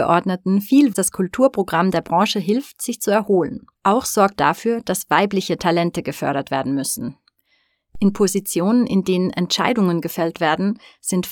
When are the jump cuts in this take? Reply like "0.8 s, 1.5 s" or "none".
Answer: 0.9 s, 3.8 s, 4.4 s